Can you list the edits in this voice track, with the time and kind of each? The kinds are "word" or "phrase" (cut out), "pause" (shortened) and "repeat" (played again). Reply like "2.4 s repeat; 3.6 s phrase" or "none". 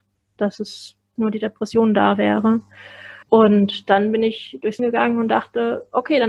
1.2 s phrase; 3.2 s pause; 4.8 s word